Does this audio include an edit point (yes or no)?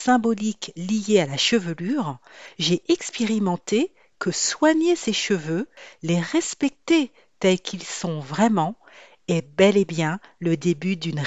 no